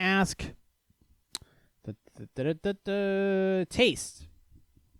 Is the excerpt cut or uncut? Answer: uncut